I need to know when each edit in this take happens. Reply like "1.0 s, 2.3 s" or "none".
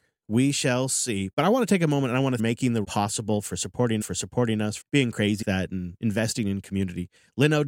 2.4 s, 2.8 s, 4.0 s, 4.8 s, 5.4 s